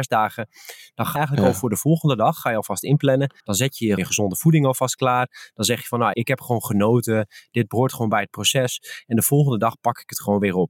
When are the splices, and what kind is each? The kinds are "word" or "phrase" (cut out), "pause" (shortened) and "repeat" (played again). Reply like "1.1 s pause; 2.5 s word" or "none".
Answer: 1.2 s word; 3.4 s pause; 4.0 s word; 6.1 s word